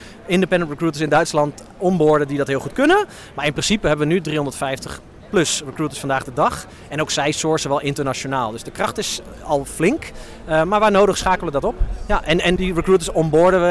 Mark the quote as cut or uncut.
cut